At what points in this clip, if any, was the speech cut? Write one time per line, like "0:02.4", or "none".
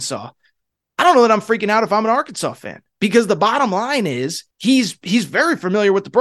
0:02.9
0:04.5